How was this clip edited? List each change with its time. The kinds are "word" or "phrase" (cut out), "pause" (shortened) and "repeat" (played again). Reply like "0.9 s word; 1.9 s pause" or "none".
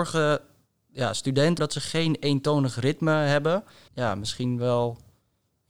1.6 s word; 3.9 s word